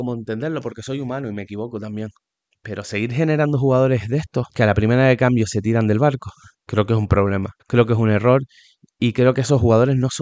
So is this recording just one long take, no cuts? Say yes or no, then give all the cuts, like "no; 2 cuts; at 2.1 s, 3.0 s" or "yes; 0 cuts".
no; 4 cuts; at 2.4 s, 4.5 s, 6.5 s, 7.6 s